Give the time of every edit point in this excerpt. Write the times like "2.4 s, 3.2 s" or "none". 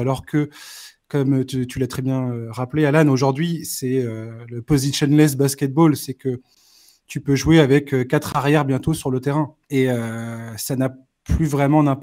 9.6 s